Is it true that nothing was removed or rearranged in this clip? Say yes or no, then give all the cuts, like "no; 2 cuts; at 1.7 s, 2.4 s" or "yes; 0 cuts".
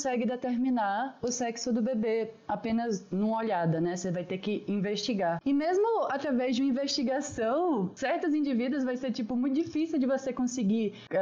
yes; 0 cuts